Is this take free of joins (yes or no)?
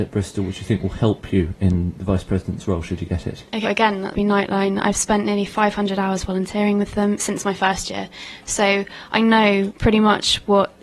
no